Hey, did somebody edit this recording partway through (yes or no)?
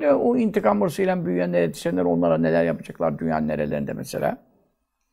no